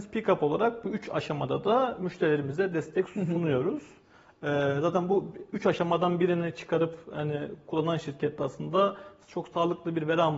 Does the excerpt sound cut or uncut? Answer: uncut